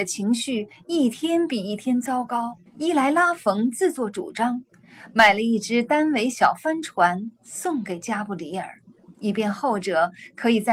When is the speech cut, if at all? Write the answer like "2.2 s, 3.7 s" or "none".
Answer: 2.7 s, 9.2 s

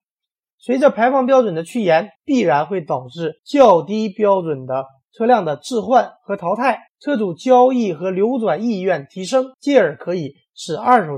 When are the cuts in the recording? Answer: 2.2 s, 3.4 s, 6.9 s, 9.5 s

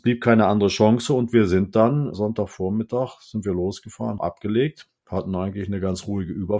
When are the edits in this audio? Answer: 2.1 s, 4.2 s, 5.0 s

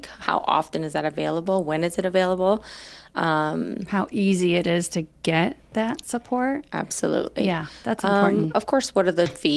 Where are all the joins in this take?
none

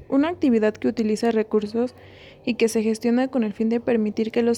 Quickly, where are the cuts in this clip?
none

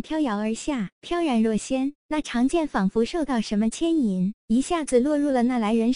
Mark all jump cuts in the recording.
0.9 s

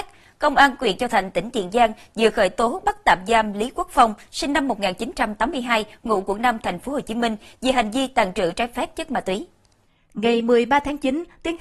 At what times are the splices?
none

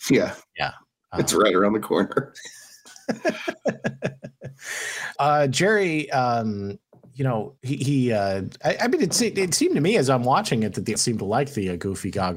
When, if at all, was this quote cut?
5.2 s, 6.9 s, 7.6 s, 11.0 s

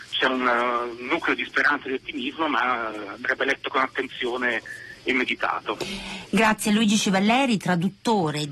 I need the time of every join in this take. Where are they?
none

